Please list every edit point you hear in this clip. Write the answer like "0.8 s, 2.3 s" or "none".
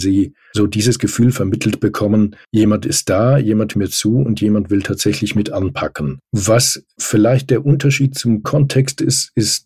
2.4 s, 3.7 s, 6.3 s, 8.4 s